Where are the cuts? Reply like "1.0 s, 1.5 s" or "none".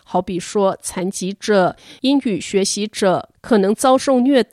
none